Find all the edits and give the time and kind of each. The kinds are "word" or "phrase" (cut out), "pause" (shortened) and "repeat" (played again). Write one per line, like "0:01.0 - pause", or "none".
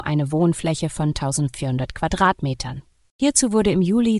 none